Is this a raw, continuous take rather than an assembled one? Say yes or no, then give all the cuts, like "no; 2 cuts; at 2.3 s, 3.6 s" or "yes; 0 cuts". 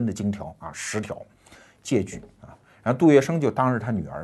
yes; 0 cuts